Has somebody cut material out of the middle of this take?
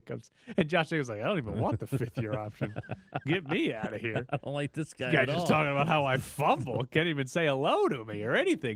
no; 0 cuts

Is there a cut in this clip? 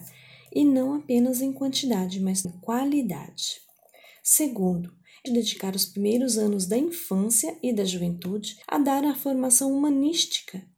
yes; 3 cuts; at 2.4 s, 5.3 s, 8.6 s

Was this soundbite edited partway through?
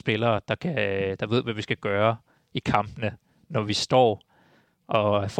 no; 0 cuts

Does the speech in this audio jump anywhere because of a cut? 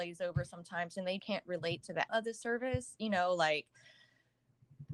yes; 2 cuts; at 1.2 s, 2.1 s

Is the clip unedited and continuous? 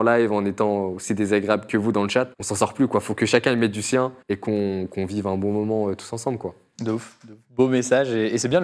no; 2 cuts; at 2.3 s, 4.2 s

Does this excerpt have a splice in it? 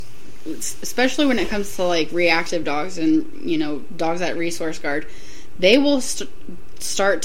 no; 0 cuts

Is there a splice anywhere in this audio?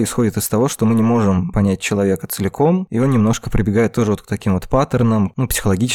no; 0 cuts

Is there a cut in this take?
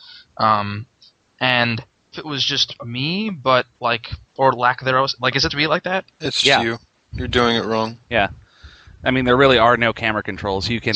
yes; 6 cuts; at 2.1 s, 3.7 s, 4.4 s, 5.5 s, 6.4 s, 8.0 s

